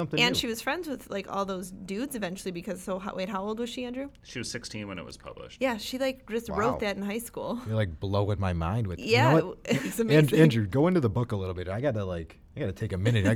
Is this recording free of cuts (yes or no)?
yes